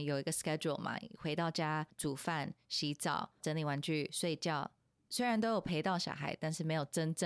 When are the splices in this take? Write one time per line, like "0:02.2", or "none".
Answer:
none